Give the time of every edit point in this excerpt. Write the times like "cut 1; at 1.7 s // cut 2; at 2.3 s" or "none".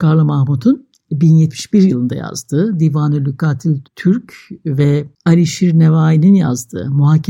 cut 1; at 3.9 s // cut 2; at 5.1 s